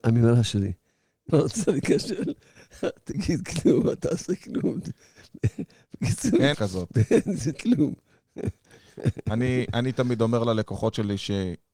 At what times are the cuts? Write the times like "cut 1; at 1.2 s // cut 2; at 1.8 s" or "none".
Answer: cut 1; at 1.3 s // cut 2; at 1.7 s // cut 3; at 6.5 s // cut 4; at 7.5 s